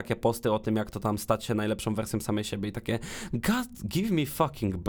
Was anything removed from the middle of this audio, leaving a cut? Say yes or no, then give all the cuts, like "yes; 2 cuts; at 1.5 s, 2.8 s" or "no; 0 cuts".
no; 0 cuts